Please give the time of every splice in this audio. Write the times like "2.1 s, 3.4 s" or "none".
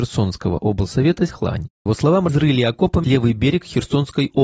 1.3 s, 1.9 s, 2.3 s, 3.0 s